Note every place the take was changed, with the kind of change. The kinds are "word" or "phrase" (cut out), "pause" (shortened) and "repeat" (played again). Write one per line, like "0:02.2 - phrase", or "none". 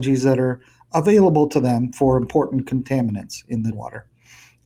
0:03.7 - word